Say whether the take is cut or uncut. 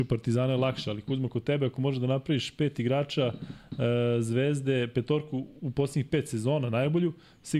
uncut